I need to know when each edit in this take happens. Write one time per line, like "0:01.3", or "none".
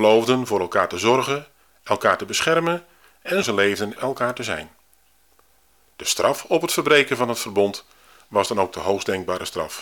0:03.4
0:04.0